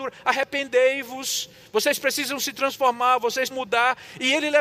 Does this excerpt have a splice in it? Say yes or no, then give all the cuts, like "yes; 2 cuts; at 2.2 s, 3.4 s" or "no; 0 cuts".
yes; 1 cut; at 3.5 s